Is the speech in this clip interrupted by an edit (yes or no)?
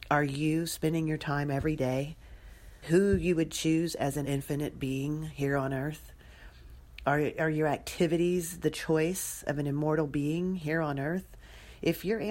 yes